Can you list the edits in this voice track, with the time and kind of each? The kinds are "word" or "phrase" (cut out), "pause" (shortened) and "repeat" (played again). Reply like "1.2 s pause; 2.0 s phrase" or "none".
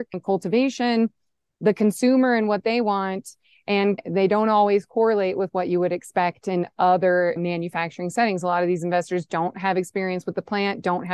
none